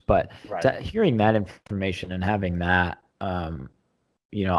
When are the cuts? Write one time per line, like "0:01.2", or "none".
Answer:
0:03.1